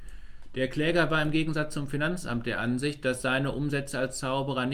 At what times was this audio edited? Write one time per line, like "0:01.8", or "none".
none